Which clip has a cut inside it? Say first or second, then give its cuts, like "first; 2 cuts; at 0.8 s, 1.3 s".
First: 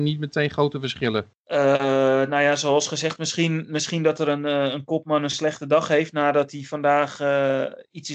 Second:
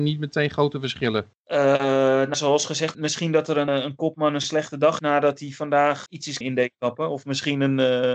second; 6 cuts; at 2.3 s, 2.9 s, 3.7 s, 5.0 s, 6.1 s, 6.4 s